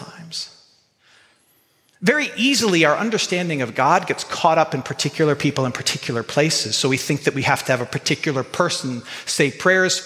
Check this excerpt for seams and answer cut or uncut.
uncut